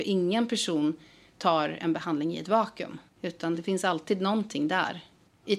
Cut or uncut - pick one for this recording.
uncut